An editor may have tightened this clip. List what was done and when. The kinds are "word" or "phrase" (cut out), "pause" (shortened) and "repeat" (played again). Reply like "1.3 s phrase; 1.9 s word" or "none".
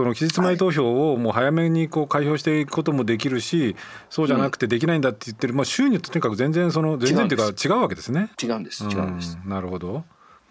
8.3 s pause